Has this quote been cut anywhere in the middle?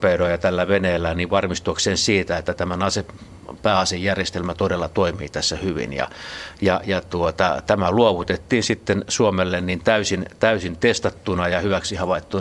no; 0 cuts

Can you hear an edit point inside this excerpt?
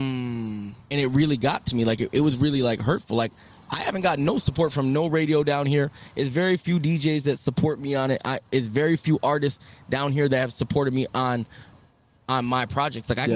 no; 0 cuts

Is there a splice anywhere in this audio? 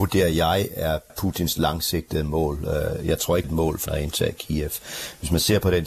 yes; 3 cuts; at 1.1 s, 3.4 s, 3.9 s

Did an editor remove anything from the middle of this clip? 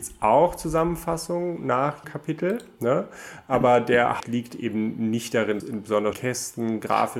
yes; 4 cuts; at 2.0 s, 4.2 s, 5.6 s, 6.1 s

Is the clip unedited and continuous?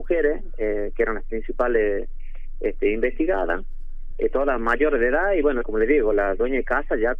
yes; 0 cuts

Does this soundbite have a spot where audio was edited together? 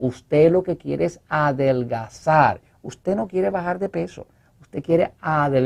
no; 0 cuts

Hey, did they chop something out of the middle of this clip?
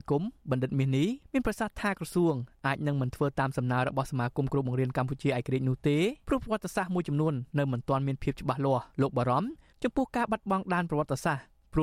yes; 4 cuts; at 1.2 s, 6.2 s, 7.5 s, 8.9 s

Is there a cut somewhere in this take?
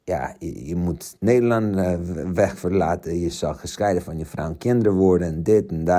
no; 0 cuts

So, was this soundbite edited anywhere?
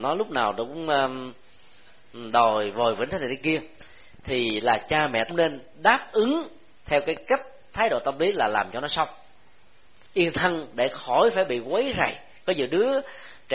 yes; 1 cut; at 5.3 s

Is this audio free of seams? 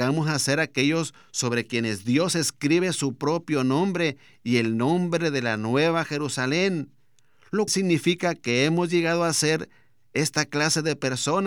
no; 1 cut; at 7.7 s

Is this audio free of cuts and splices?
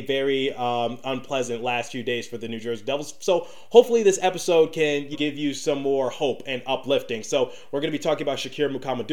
no; 1 cut; at 5.1 s

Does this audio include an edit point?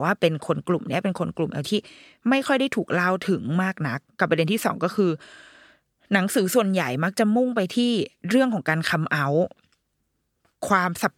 yes; 1 cut; at 1.6 s

